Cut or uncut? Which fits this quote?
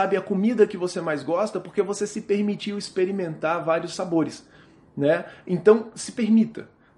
uncut